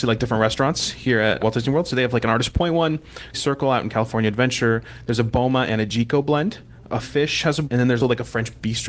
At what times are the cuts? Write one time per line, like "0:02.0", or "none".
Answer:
0:01.4
0:03.3
0:07.0
0:07.6
0:08.0